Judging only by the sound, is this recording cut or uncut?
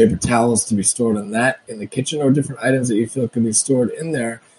uncut